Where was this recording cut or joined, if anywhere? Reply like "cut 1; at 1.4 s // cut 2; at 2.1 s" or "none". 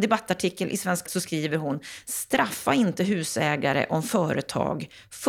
cut 1; at 1.1 s